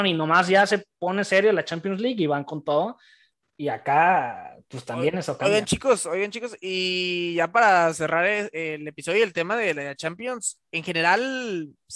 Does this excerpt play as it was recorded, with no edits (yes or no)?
yes